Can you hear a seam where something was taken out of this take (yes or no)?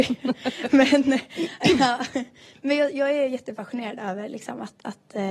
no